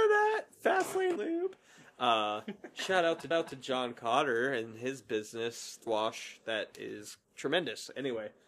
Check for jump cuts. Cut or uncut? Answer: cut